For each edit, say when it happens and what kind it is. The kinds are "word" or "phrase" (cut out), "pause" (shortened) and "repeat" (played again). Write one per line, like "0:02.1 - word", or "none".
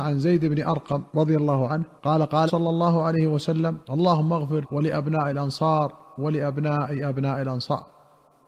0:01.1 - pause
0:02.0 - pause
0:02.5 - word
0:03.8 - pause
0:04.6 - word